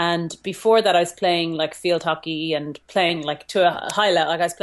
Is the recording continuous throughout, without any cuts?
yes; 0 cuts

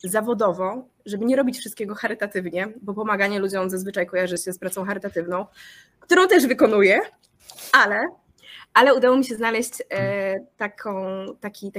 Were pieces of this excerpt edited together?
no; 0 cuts

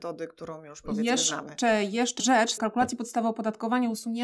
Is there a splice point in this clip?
yes; 2 cuts; at 2.2 s, 2.6 s

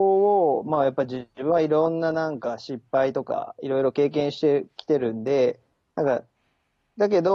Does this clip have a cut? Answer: no; 0 cuts

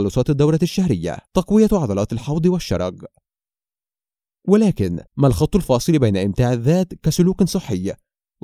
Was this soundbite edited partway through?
yes; 2 cuts; at 1.3 s, 5.1 s

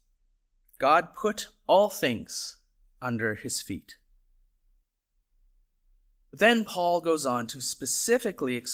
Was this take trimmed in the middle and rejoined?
no; 0 cuts

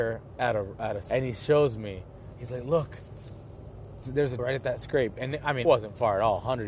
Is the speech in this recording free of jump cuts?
no; 4 cuts; at 1.0 s, 4.0 s, 4.4 s, 5.6 s

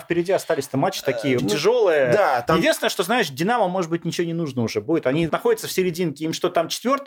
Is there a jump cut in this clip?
yes; 2 cuts; at 1.4 s, 5.3 s

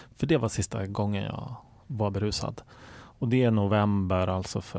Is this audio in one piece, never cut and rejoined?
yes; 0 cuts

